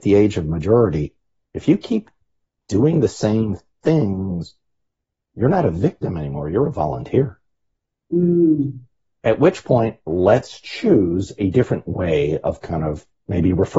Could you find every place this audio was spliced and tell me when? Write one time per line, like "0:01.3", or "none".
none